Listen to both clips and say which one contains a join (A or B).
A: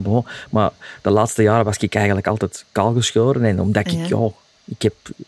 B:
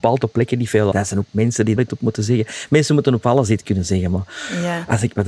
B